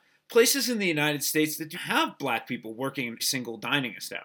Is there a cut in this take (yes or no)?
yes